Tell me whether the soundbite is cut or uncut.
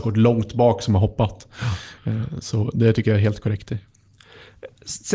uncut